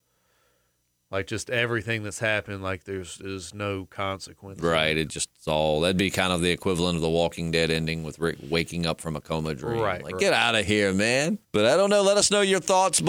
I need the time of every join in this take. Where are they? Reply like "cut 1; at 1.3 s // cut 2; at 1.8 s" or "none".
cut 1; at 11.4 s